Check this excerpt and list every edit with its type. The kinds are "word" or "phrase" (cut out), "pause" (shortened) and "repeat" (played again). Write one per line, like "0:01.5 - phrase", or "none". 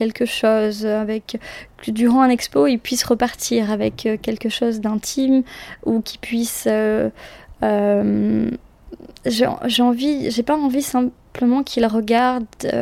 0:09.1 - pause